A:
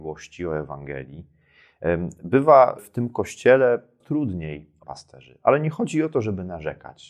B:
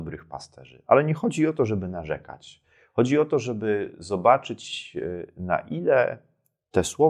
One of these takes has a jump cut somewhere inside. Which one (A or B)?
A